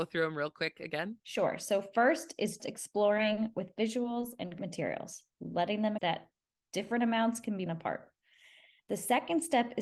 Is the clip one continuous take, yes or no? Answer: no